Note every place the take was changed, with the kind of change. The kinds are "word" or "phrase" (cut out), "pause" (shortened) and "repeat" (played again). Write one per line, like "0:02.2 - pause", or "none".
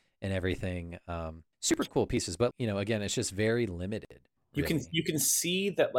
0:01.5 - pause
0:02.5 - word
0:04.4 - pause